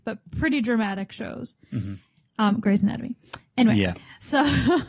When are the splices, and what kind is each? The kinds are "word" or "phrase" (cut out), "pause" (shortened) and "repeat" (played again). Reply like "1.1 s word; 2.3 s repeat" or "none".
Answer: none